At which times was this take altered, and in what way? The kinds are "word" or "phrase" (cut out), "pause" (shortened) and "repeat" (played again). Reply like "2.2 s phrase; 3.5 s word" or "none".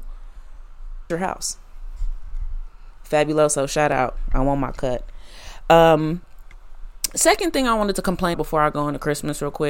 1.1 s word; 8.3 s word